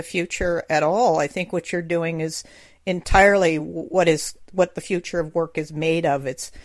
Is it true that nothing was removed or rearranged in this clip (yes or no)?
yes